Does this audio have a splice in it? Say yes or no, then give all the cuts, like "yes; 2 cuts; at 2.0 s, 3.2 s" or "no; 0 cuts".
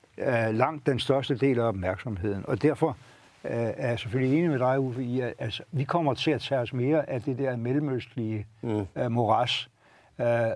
no; 0 cuts